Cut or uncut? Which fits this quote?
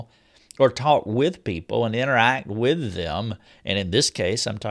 cut